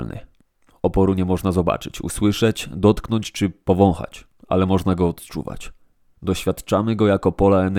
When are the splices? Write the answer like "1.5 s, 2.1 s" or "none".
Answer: 6.1 s